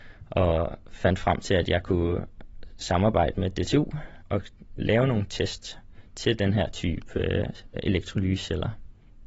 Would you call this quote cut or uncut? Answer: uncut